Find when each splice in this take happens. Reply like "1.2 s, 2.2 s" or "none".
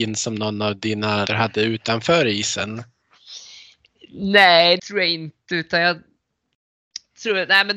1.3 s, 4.8 s